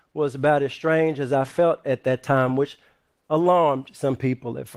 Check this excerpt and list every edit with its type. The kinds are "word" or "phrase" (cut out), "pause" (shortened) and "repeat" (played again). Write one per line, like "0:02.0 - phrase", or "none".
none